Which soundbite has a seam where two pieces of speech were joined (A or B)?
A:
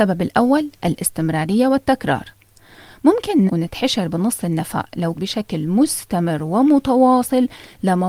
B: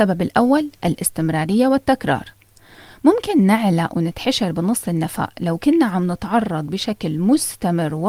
A